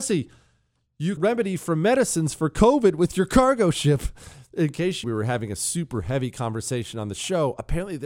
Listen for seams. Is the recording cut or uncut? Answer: cut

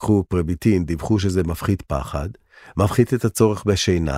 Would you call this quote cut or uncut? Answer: uncut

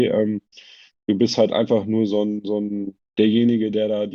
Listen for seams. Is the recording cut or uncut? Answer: cut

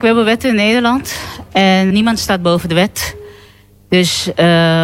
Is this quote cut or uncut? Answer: cut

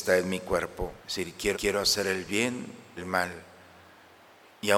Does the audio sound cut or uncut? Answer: cut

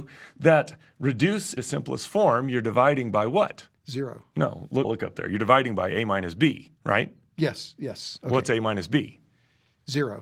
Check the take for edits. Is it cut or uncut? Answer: cut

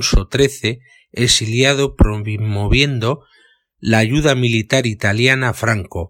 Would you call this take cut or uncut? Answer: uncut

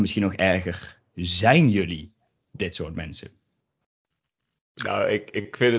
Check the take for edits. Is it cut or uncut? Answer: uncut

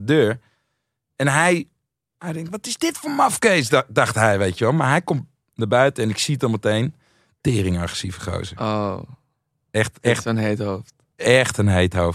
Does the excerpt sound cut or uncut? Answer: uncut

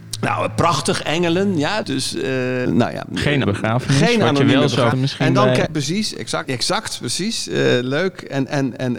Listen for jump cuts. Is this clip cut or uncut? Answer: cut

